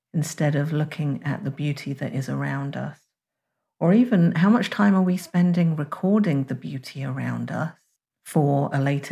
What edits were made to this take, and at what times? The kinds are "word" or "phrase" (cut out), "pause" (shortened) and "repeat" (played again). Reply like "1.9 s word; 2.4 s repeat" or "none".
none